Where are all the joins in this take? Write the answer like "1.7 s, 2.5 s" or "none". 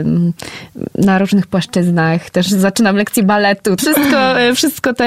3.8 s